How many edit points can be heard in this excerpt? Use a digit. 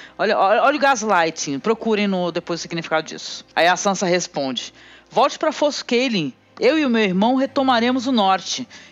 0